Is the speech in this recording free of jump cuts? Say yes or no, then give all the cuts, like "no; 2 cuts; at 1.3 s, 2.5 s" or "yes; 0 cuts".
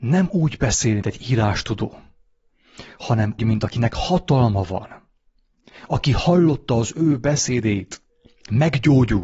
no; 3 cuts; at 1.0 s, 3.4 s, 8.1 s